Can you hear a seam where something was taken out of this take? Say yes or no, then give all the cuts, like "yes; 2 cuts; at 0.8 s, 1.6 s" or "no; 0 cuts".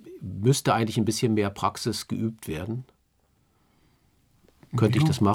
no; 0 cuts